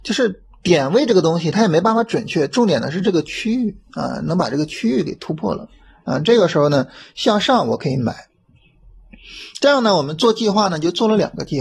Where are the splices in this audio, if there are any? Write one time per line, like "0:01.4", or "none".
none